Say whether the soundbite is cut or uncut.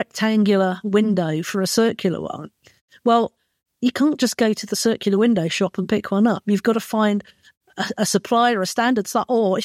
uncut